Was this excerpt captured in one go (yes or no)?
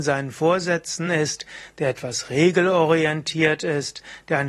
yes